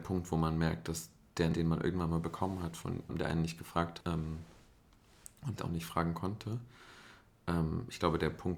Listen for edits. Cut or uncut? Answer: cut